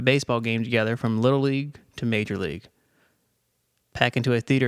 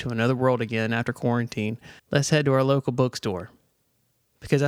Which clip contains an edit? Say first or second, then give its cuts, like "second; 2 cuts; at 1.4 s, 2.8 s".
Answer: second; 1 cut; at 2.0 s